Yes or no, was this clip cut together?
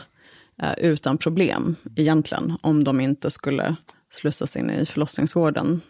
yes